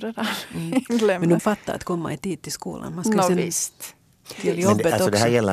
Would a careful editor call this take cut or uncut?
cut